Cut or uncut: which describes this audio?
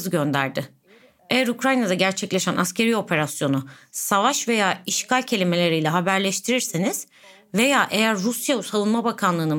uncut